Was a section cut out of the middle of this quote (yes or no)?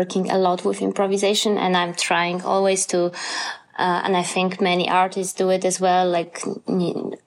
no